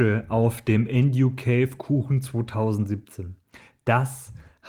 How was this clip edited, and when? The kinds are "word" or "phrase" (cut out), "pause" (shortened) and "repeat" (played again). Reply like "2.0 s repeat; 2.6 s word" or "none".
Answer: none